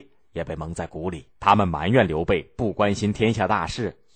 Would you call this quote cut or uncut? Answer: cut